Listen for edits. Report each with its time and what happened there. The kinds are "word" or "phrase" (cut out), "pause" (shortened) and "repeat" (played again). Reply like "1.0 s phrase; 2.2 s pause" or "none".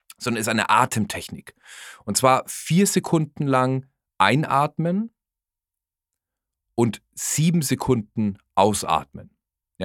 none